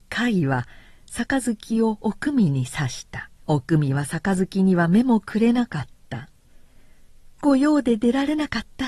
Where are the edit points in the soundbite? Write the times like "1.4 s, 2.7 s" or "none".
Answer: 3.4 s, 6.4 s